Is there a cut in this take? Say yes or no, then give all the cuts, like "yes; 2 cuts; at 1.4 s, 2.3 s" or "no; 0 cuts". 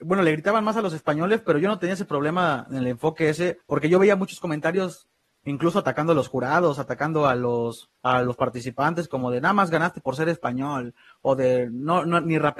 yes; 2 cuts; at 3.6 s, 7.9 s